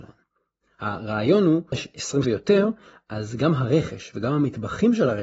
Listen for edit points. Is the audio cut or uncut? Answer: cut